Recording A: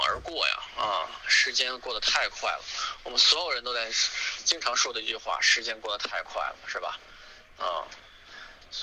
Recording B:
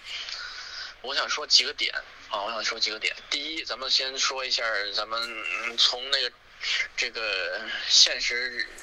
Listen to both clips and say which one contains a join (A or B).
B